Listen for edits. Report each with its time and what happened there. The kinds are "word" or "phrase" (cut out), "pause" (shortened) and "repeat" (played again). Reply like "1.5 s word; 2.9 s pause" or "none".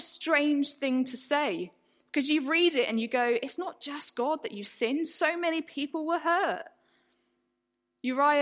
none